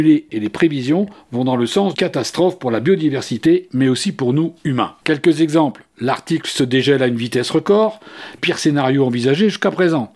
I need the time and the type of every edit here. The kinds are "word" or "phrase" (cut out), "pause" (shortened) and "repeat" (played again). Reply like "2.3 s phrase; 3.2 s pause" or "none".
1.9 s word; 5.0 s pause; 8.4 s phrase